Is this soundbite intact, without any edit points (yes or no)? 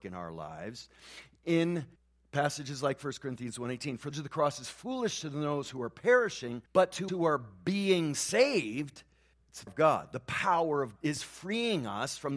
no